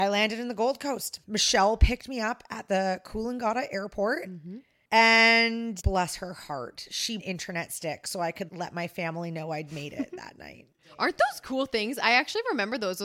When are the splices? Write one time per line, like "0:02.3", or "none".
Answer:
0:01.2
0:05.8
0:07.2
0:08.5